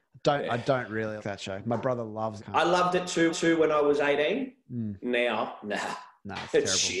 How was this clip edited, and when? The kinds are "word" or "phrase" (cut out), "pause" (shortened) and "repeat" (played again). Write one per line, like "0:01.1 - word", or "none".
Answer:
0:01.2 - word
0:02.4 - phrase
0:03.3 - repeat